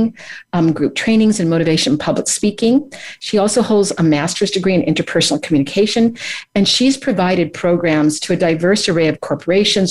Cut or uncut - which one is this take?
uncut